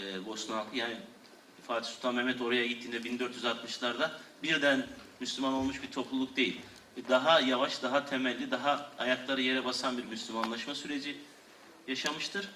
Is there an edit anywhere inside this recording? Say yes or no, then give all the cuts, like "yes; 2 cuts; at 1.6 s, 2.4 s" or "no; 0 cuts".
no; 0 cuts